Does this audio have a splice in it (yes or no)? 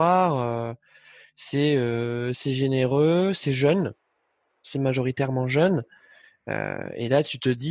no